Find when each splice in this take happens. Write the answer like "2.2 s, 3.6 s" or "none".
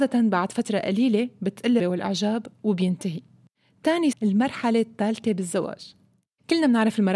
1.8 s, 4.1 s